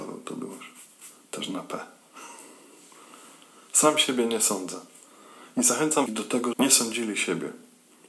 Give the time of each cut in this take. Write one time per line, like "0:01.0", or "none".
0:06.1
0:06.5